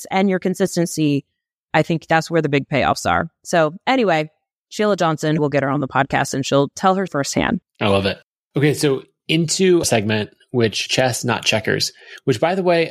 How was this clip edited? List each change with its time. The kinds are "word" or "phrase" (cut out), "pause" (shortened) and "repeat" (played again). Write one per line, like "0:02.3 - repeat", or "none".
0:05.4 - word
0:07.1 - word
0:09.8 - word
0:10.9 - word

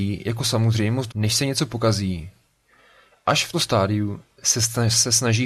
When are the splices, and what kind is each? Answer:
0:01.1 - phrase
0:03.5 - word

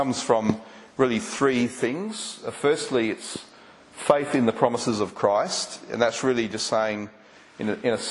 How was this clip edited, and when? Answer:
none

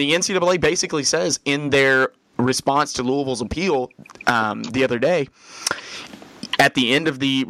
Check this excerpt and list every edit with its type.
none

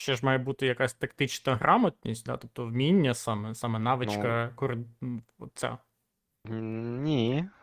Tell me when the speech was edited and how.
none

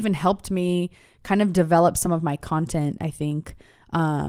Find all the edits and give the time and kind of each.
none

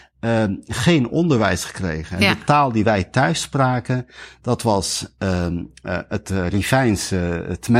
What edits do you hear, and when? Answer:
none

